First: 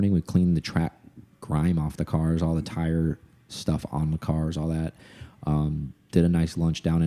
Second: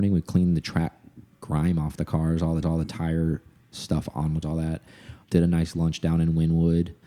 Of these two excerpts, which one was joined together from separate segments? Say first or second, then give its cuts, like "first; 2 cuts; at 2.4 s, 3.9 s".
second; 3 cuts; at 2.6 s, 4.4 s, 5.2 s